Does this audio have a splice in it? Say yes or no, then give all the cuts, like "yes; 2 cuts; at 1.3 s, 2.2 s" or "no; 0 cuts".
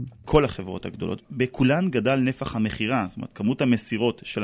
no; 0 cuts